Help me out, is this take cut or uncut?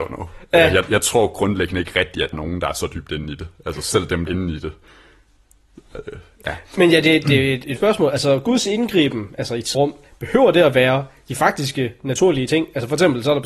cut